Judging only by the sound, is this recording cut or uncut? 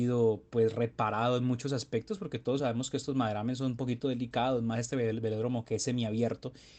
uncut